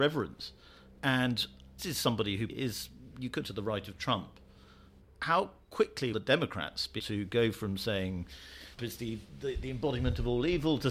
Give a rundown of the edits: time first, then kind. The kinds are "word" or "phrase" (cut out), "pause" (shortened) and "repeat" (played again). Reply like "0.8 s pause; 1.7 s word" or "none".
1.8 s word; 2.5 s word; 3.4 s word; 6.1 s word; 7.0 s word; 8.8 s word